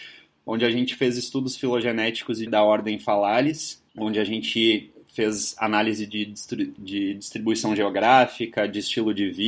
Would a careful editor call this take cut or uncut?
cut